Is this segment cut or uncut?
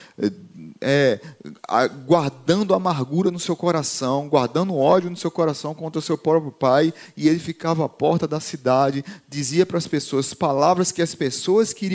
uncut